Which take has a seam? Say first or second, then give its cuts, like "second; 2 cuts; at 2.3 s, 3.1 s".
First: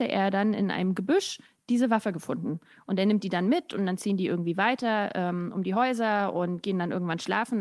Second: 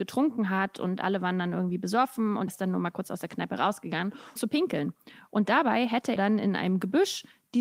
second; 3 cuts; at 2.5 s, 4.4 s, 6.2 s